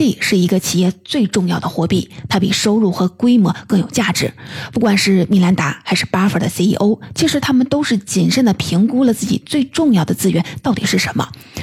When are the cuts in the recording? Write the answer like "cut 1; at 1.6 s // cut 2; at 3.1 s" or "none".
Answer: none